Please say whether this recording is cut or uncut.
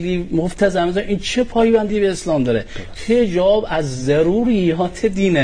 uncut